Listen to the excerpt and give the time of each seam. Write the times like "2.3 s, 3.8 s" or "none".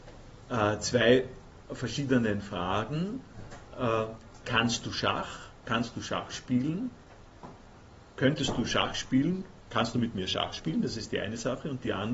none